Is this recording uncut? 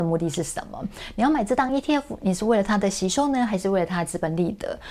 yes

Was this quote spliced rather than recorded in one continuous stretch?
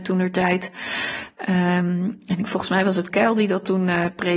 yes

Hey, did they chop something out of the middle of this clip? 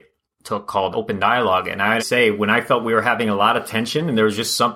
yes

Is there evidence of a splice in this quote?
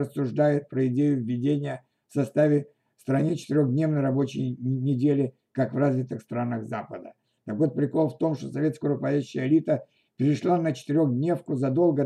no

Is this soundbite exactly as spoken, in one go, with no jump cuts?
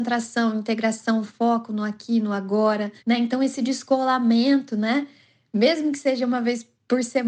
no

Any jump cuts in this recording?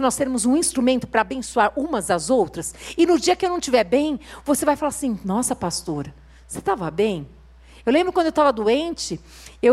no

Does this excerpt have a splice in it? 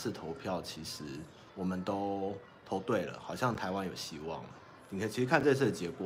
yes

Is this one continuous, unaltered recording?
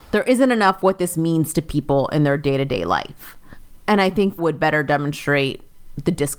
no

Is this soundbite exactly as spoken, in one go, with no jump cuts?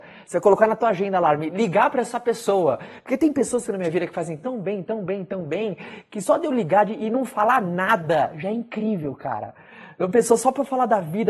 yes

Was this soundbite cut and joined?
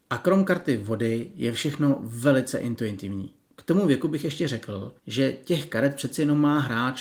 yes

